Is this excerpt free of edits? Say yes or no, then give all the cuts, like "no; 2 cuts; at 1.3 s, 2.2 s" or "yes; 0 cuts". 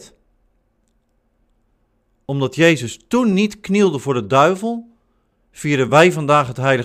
yes; 0 cuts